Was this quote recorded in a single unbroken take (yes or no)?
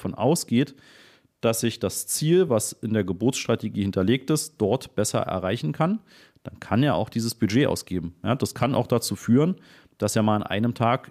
yes